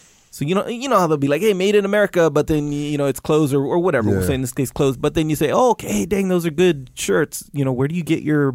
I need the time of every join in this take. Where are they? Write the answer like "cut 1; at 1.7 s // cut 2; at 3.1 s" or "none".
none